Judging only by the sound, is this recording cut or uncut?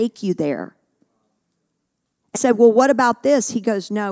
cut